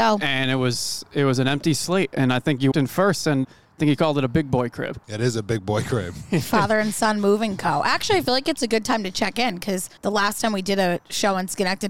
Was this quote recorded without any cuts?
no; 4 cuts; at 2.7 s, 3.4 s, 5.0 s, 10.0 s

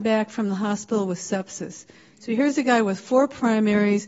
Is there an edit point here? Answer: no; 0 cuts

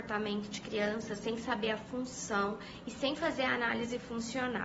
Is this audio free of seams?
yes; 0 cuts

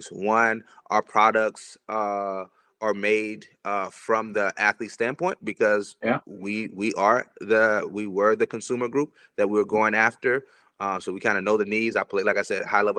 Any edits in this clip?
no; 0 cuts

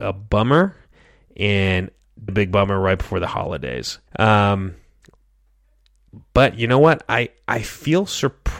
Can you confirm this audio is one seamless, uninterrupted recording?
no; 2 cuts; at 2.3 s, 4.1 s

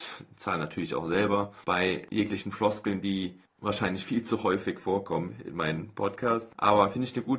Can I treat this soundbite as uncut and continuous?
yes; 0 cuts

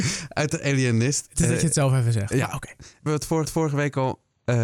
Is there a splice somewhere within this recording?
yes; 2 cuts; at 3.1 s, 3.4 s

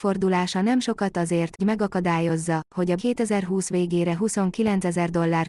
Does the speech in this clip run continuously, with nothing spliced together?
no; 3 cuts; at 1.1 s, 1.6 s, 3.0 s

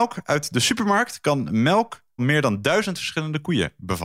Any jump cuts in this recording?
yes; 1 cut; at 2.2 s

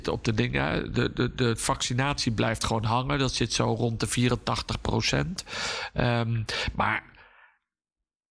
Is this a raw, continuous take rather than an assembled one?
yes; 0 cuts

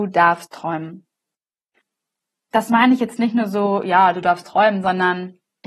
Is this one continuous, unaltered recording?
yes; 0 cuts

